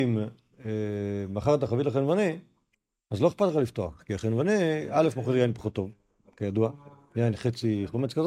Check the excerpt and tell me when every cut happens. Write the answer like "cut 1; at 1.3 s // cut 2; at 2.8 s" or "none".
none